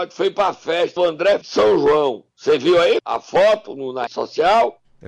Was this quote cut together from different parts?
yes; 5 cuts; at 1.0 s, 1.4 s, 2.3 s, 3.0 s, 4.1 s

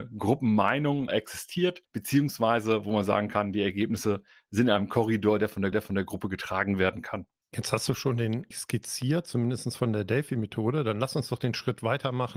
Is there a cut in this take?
yes; 4 cuts; at 1.1 s, 1.8 s, 5.7 s, 8.5 s

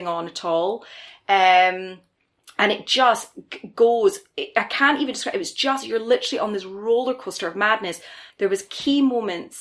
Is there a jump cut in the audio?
no; 0 cuts

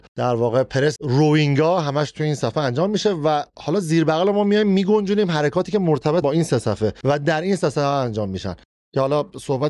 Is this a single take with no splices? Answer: no; 2 cuts; at 1.0 s, 6.2 s

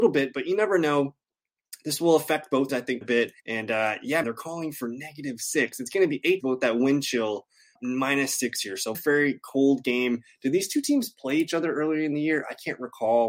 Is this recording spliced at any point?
yes; 7 cuts; at 2.7 s, 3.0 s, 3.4 s, 4.2 s, 6.4 s, 7.8 s, 8.9 s

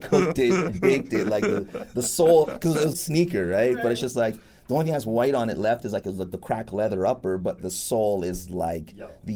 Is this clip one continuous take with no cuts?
no; 2 cuts; at 2.9 s, 7.6 s

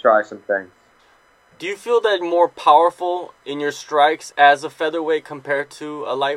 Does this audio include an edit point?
yes; 2 cuts; at 2.2 s, 4.3 s

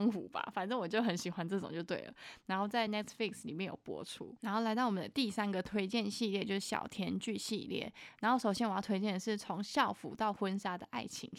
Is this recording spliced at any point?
no; 0 cuts

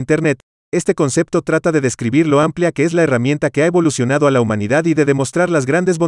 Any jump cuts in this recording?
no; 0 cuts

